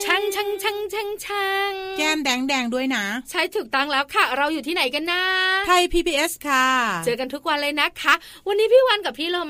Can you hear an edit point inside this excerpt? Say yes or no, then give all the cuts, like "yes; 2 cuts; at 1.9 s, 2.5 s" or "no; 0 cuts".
yes; 1 cut; at 6.4 s